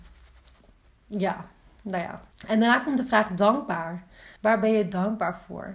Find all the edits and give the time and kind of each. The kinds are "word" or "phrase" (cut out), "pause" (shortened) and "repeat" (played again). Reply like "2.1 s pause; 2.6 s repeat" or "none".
2.3 s pause; 4.4 s pause

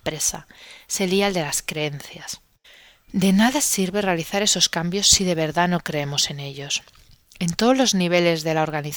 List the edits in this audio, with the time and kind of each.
2.6 s pause

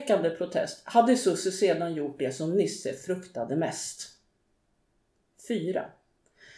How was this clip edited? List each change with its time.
none

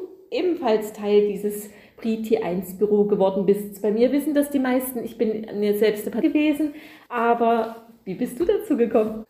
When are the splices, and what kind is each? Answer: 6.2 s word

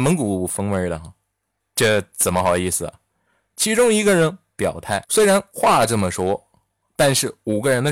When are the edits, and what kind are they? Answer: none

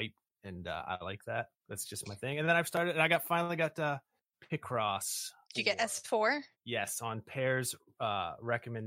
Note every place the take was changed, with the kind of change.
1.5 s pause; 5.4 s pause; 6.5 s pause

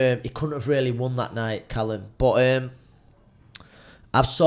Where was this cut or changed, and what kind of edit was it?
none

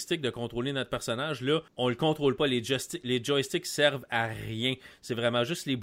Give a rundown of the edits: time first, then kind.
1.7 s pause

